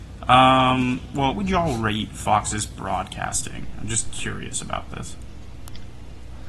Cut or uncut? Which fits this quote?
cut